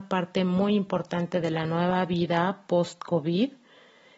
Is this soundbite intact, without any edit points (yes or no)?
yes